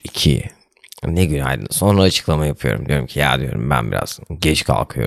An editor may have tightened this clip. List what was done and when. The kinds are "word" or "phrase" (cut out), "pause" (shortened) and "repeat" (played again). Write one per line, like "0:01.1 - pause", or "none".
none